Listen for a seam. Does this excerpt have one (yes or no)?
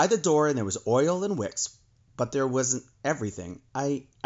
no